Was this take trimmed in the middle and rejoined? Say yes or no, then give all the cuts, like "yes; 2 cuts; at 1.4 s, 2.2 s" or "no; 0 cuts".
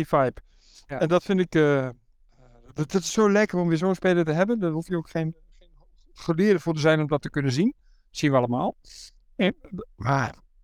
no; 0 cuts